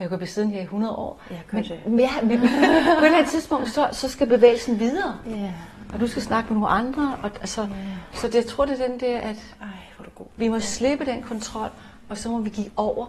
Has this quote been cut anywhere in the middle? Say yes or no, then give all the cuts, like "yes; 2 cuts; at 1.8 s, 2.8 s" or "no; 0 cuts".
no; 0 cuts